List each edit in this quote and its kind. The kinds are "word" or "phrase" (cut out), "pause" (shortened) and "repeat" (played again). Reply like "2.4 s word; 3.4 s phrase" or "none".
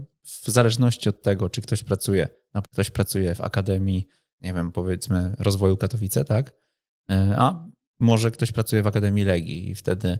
2.6 s phrase